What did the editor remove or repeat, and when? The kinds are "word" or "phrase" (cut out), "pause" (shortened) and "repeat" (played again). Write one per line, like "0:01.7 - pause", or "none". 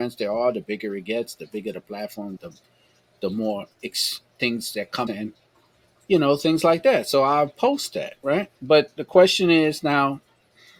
0:02.4 - word
0:05.1 - phrase
0:08.6 - pause